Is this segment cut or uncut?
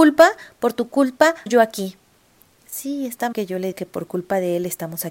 cut